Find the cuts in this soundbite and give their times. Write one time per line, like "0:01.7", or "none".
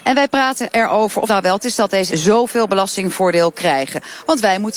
0:01.3
0:01.6
0:02.1